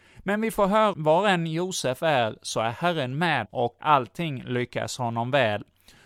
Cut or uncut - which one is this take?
cut